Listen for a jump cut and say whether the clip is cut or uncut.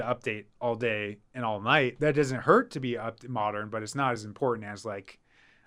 uncut